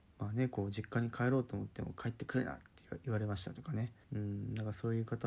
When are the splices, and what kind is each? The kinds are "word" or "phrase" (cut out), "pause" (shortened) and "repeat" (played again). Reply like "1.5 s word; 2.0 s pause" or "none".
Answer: 4.0 s pause